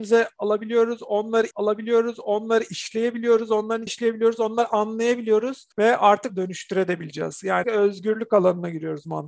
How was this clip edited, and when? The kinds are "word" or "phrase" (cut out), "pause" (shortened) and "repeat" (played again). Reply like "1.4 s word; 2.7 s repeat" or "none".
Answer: 1.5 s repeat; 3.9 s word; 5.7 s pause; 6.3 s word; 7.6 s word